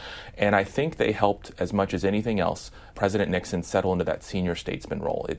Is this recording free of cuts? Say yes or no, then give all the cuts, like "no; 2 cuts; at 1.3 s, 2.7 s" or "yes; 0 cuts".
no; 1 cut; at 2.9 s